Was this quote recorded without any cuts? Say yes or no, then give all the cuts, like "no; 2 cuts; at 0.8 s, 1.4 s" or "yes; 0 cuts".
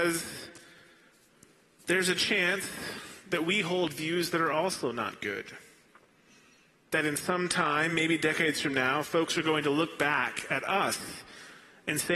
yes; 0 cuts